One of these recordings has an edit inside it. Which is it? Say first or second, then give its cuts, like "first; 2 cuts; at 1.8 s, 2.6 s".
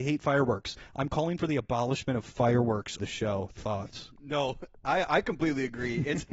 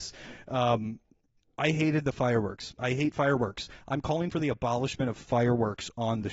first; 1 cut; at 3.0 s